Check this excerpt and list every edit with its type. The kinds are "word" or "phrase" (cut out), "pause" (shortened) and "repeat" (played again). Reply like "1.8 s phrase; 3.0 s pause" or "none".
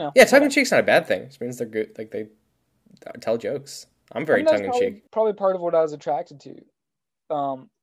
5.1 s pause